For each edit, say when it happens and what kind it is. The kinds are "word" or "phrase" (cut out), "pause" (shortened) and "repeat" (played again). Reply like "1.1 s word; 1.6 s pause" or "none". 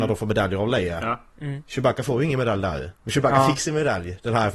1.3 s pause; 3.0 s pause